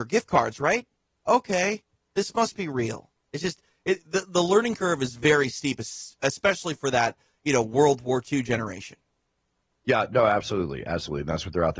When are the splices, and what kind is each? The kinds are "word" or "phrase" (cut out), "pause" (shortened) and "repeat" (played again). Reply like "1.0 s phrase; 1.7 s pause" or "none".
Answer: none